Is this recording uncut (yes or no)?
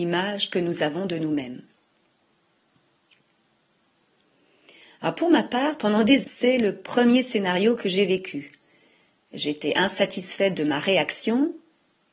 no